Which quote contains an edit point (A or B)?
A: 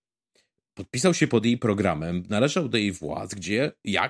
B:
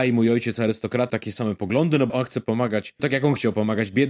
B